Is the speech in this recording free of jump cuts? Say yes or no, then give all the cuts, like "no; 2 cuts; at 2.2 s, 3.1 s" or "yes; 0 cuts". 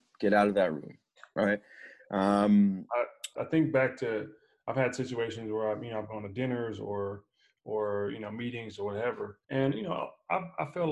no; 2 cuts; at 3.4 s, 9.4 s